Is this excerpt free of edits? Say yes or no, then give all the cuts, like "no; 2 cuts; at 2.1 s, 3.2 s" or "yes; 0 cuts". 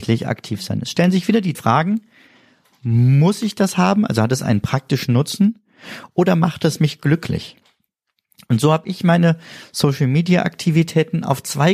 no; 1 cut; at 1.5 s